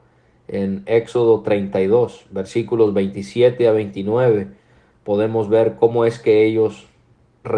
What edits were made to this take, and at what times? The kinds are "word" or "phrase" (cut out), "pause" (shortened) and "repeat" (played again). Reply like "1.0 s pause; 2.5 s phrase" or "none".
none

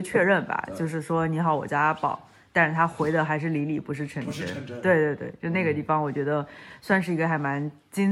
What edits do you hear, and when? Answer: none

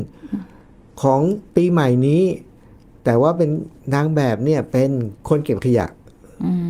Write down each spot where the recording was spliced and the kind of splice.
1.5 s pause

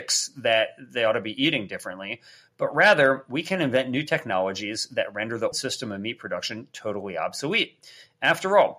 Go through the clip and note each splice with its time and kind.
5.5 s word

